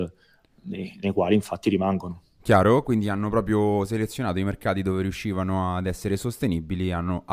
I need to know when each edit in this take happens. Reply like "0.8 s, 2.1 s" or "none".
none